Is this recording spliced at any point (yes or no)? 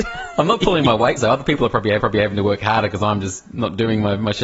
yes